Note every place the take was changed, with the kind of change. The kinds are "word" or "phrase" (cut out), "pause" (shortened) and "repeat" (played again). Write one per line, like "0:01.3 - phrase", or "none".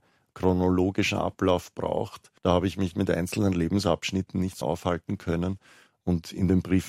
0:02.4 - pause
0:02.9 - word
0:04.6 - word